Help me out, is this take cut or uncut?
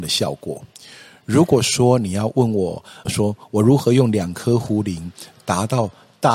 cut